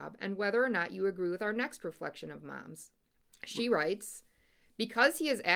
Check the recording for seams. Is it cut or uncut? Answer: cut